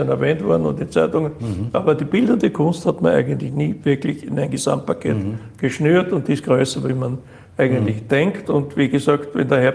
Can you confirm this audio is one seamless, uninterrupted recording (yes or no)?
yes